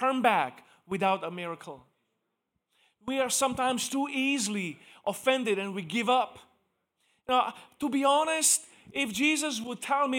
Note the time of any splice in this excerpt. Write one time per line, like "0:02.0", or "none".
none